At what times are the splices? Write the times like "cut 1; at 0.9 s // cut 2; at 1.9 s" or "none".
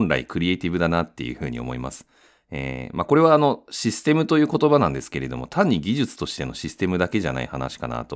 none